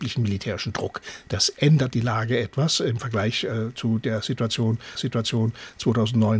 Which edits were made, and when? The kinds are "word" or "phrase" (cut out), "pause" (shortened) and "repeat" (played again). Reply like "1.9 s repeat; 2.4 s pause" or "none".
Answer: 4.9 s repeat